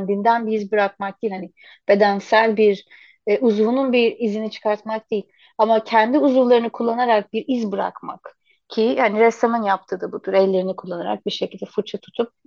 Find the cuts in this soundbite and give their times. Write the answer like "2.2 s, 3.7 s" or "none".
none